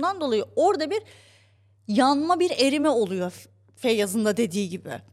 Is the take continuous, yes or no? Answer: yes